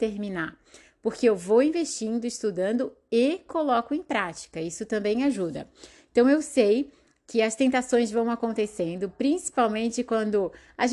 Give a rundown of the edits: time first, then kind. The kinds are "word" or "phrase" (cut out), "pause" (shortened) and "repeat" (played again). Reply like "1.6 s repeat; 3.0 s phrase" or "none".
none